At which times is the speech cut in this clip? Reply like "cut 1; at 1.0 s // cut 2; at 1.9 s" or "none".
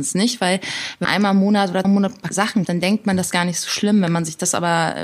cut 1; at 1.0 s // cut 2; at 1.8 s // cut 3; at 2.3 s // cut 4; at 2.6 s // cut 5; at 3.3 s